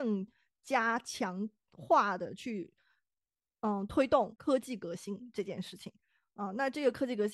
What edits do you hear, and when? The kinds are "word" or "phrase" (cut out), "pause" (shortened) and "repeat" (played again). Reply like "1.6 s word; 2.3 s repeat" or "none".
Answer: none